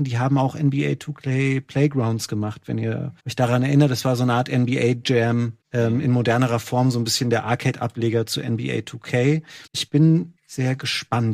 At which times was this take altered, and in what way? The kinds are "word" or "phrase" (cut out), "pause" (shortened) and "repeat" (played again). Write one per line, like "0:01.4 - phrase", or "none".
0:03.2 - pause
0:05.6 - pause
0:09.7 - pause
0:10.4 - word